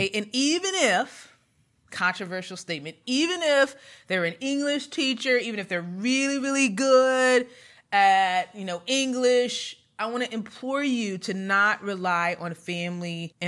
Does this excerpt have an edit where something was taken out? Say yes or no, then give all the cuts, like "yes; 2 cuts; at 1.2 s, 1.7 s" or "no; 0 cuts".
no; 0 cuts